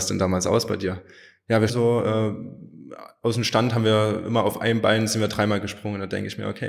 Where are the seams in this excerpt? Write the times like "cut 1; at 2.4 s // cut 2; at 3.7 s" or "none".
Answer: cut 1; at 1.7 s